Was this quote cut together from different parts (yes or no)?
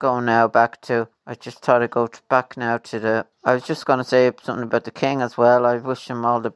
yes